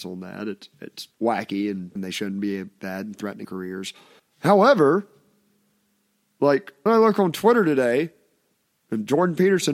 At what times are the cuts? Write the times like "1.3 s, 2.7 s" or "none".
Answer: 1.1 s, 2.0 s, 2.8 s, 3.4 s, 4.2 s, 6.9 s